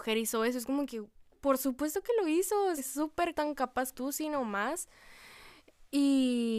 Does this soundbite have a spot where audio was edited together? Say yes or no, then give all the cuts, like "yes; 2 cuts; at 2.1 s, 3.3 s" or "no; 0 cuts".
yes; 4 cuts; at 1.3 s, 2.8 s, 3.3 s, 3.9 s